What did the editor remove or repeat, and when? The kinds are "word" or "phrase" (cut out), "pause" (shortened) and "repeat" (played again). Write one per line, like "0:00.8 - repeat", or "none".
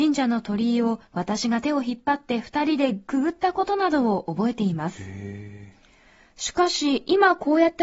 0:01.1 - pause